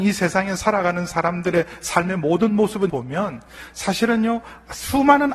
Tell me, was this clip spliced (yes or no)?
yes